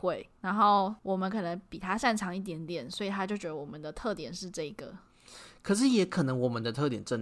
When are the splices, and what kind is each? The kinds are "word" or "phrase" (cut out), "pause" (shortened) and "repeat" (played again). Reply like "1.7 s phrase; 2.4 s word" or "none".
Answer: 1.0 s pause

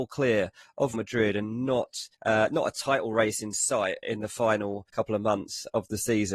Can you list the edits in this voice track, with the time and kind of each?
0.9 s word; 2.1 s pause; 4.0 s word; 4.9 s pause

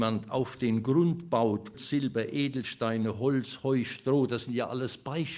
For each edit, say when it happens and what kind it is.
1.7 s word

